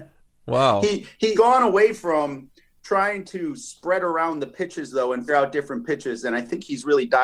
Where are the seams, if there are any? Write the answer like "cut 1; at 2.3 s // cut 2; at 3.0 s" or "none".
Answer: cut 1; at 1.3 s // cut 2; at 5.3 s